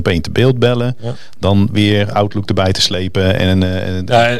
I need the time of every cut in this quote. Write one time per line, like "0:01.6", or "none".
none